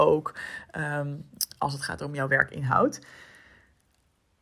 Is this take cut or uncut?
uncut